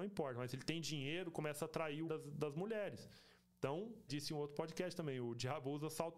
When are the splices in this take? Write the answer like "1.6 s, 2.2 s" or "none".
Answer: 2.1 s, 4.1 s